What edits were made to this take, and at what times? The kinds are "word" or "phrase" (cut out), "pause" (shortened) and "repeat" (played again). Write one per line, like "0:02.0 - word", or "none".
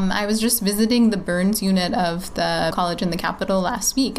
0:02.7 - word